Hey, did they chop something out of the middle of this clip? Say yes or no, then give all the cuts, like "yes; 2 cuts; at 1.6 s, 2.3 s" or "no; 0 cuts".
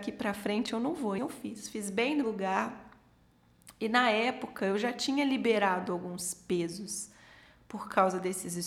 yes; 2 cuts; at 1.2 s, 2.2 s